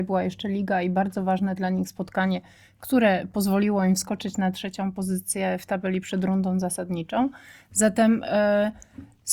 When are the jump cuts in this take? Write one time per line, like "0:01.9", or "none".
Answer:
none